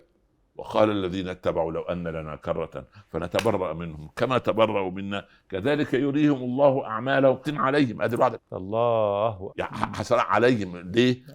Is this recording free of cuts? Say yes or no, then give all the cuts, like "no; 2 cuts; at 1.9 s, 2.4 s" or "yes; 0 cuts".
no; 3 cuts; at 7.4 s, 8.4 s, 9.5 s